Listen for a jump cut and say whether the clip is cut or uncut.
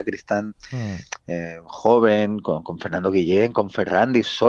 uncut